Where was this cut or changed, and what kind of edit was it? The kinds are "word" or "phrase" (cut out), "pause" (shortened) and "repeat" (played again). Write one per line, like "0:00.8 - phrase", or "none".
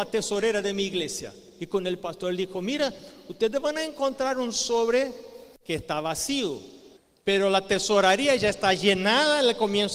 0:07.0 - pause